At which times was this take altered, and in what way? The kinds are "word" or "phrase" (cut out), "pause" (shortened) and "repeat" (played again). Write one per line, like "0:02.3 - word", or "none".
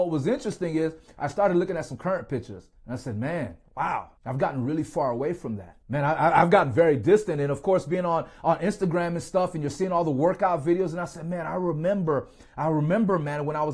0:02.8 - pause
0:04.2 - pause
0:05.8 - pause